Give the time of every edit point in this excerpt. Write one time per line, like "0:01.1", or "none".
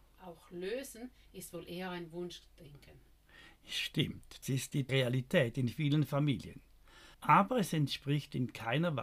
0:04.4
0:04.9
0:07.1